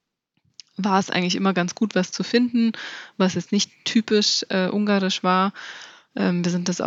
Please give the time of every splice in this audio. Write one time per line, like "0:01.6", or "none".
none